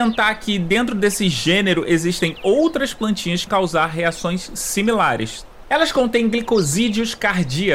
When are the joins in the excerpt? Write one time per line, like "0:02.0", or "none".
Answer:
0:03.5